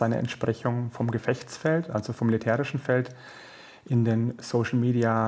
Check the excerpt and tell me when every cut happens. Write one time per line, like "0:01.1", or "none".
none